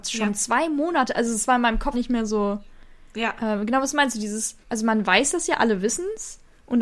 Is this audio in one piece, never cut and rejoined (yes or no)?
no